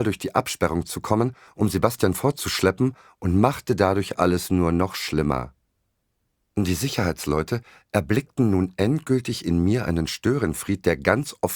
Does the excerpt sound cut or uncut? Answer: uncut